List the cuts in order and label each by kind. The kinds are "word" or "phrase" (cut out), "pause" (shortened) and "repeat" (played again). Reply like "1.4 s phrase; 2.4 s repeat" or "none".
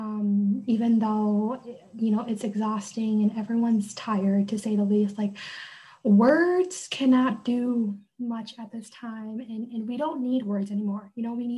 none